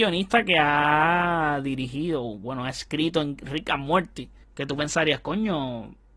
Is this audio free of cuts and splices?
no; 1 cut; at 4.4 s

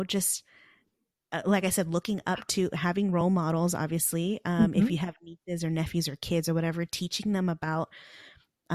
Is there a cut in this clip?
no; 0 cuts

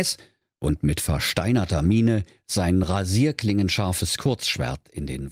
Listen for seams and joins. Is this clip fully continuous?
yes; 0 cuts

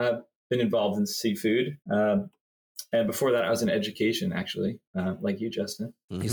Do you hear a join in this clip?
yes; 2 cuts; at 1.8 s, 4.9 s

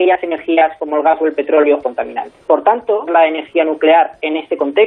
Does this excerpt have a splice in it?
yes; 3 cuts; at 1.8 s, 2.4 s, 3.1 s

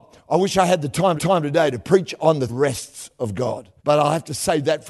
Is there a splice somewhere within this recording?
yes; 3 cuts; at 1.2 s, 2.5 s, 3.8 s

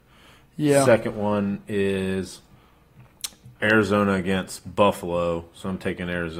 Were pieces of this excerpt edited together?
yes; 1 cut; at 3.5 s

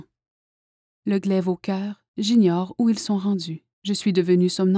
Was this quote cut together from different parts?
yes; 2 cuts; at 2.1 s, 3.7 s

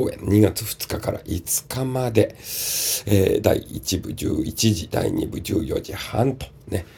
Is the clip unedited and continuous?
yes; 0 cuts

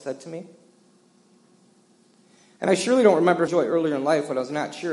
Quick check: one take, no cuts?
no; 1 cut; at 3.5 s

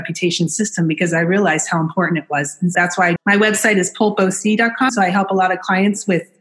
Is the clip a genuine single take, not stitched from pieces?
no; 3 cuts; at 2.7 s, 3.2 s, 4.9 s

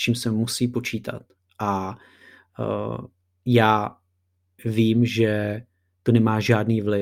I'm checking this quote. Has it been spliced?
no; 0 cuts

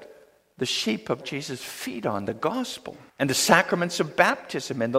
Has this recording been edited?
yes; 2 cuts; at 1.2 s, 3.1 s

